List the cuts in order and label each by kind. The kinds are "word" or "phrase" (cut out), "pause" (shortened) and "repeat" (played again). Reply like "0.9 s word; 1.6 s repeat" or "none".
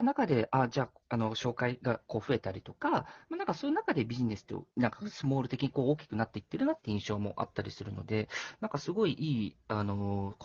1.0 s pause; 4.7 s pause

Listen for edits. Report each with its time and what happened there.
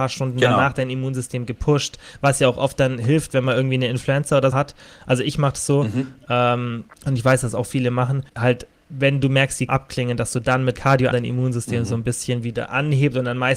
4.5 s word; 6.9 s pause; 8.3 s pause; 9.7 s phrase; 10.7 s word; 11.1 s phrase

